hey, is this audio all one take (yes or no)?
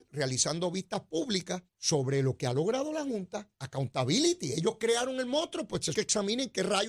no